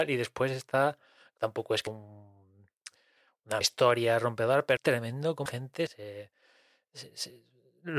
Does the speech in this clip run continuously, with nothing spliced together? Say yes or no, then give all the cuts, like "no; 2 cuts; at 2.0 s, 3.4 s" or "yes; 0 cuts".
no; 6 cuts; at 1.4 s, 1.9 s, 3.6 s, 4.8 s, 5.5 s, 5.9 s